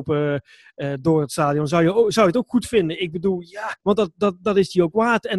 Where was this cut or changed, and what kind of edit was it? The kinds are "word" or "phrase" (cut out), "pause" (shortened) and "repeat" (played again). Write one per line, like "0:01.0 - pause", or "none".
0:03.8 - pause